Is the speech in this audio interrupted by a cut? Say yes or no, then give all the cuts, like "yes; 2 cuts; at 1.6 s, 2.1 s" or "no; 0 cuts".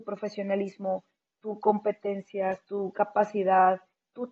no; 0 cuts